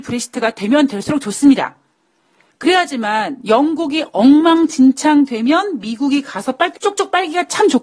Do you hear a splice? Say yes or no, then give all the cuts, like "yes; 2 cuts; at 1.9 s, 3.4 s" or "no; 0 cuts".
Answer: yes; 1 cut; at 6.7 s